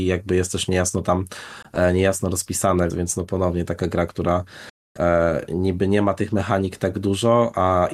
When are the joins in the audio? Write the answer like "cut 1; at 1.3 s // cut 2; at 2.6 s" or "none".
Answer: cut 1; at 2.9 s